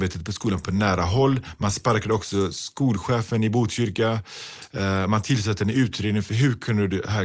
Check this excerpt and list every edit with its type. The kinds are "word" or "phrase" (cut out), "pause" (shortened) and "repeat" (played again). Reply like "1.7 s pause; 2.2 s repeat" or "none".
none